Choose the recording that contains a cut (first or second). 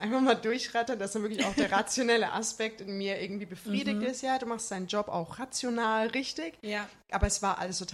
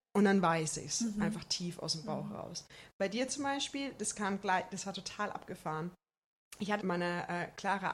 second